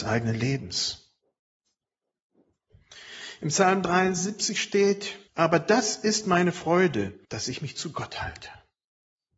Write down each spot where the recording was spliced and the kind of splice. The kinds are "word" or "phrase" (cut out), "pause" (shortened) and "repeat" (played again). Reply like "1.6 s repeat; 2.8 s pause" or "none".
5.3 s pause; 7.2 s pause